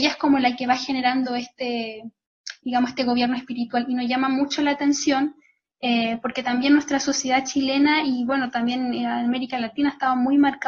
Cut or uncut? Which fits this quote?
uncut